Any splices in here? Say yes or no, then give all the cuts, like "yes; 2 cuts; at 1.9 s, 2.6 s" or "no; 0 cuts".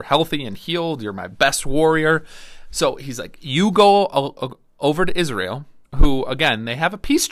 yes; 1 cut; at 5.8 s